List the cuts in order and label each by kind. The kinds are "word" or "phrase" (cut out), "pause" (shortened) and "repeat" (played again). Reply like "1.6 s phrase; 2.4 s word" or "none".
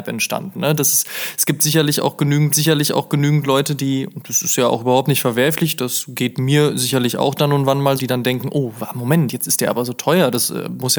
2.5 s repeat; 8.0 s word